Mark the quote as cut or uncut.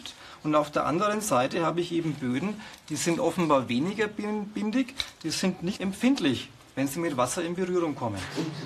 cut